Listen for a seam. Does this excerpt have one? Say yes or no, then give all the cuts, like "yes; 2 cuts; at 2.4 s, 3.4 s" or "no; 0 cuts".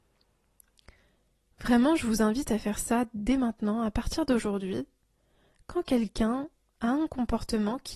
no; 0 cuts